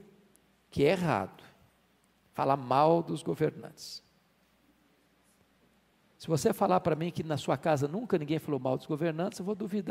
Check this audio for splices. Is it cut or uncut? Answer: uncut